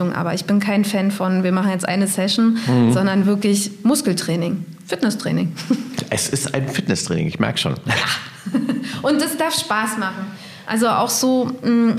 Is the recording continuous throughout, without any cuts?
yes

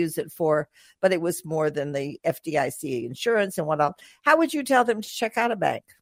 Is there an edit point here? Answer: no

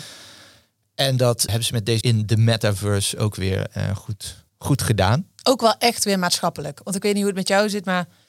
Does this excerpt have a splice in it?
yes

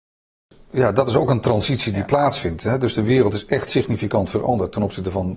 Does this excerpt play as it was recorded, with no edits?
yes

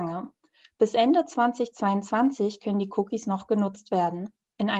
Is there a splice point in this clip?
no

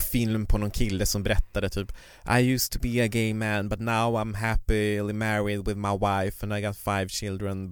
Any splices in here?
no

